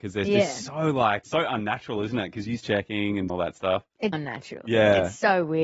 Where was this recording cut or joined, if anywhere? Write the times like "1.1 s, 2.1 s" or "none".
1.2 s, 2.6 s, 3.3 s, 4.1 s